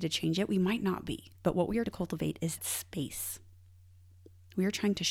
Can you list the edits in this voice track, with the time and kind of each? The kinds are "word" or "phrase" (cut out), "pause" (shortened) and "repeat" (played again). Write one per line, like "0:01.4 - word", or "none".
0:01.3 - pause
0:01.9 - word
0:02.6 - word

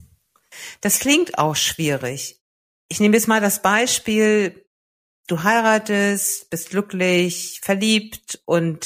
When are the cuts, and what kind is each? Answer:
none

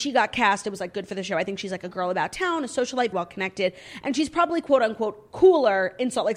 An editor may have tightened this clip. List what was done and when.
0:03.1 - word

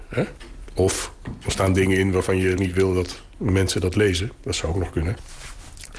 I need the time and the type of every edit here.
0:02.6 - word

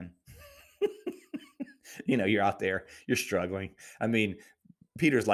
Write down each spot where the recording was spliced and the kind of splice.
none

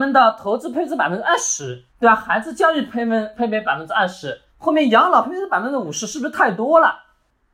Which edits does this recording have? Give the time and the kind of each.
0:01.9 - pause
0:04.5 - pause

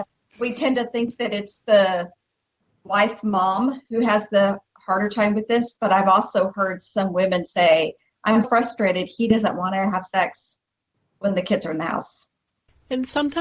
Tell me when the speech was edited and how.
0:08.4 - word

